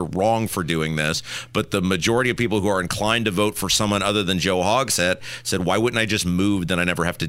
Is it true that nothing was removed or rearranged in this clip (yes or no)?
yes